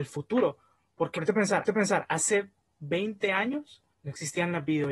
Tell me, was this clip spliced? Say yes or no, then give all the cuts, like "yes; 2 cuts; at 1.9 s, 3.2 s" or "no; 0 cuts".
yes; 3 cuts; at 1.2 s, 1.7 s, 3.9 s